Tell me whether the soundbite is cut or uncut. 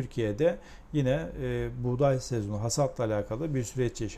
uncut